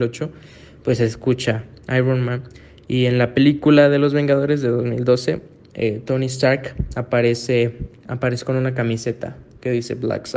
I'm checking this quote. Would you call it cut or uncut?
uncut